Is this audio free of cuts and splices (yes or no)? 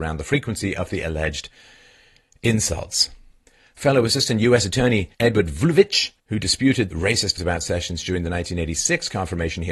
no